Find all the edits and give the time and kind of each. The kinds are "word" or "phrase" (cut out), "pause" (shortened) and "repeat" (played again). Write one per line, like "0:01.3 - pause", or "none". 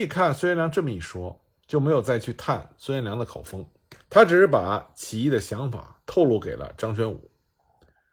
0:04.0 - pause